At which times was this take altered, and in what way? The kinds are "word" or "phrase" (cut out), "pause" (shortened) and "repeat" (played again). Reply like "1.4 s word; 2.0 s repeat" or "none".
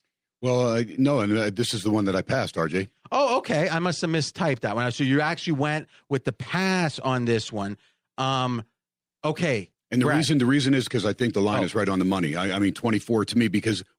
none